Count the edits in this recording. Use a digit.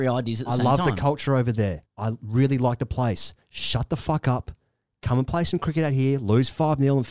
1